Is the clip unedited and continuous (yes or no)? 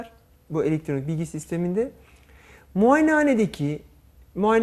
yes